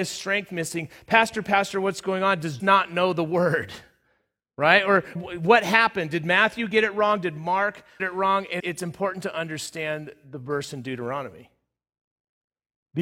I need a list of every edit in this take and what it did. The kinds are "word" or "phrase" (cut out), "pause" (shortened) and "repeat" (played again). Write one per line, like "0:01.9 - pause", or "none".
0:02.6 - word
0:05.2 - word
0:08.0 - word
0:08.6 - word

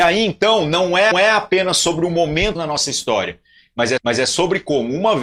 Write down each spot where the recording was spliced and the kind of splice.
0:01.1 - repeat
0:02.5 - phrase
0:04.0 - repeat

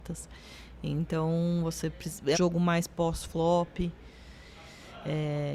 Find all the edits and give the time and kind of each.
0:02.3 - word

